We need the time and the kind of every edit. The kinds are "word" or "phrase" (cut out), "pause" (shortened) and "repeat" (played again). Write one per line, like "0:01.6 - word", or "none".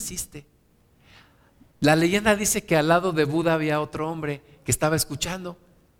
none